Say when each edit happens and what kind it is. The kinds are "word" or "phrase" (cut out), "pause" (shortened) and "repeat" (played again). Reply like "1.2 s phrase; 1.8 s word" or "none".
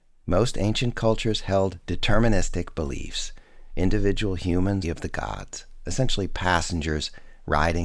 4.8 s phrase